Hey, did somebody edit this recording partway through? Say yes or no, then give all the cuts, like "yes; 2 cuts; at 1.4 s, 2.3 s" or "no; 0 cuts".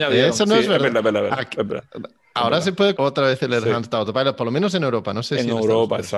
yes; 1 cut; at 3.0 s